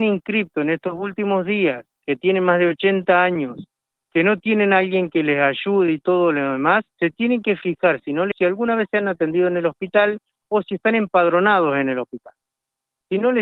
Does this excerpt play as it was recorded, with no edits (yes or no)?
no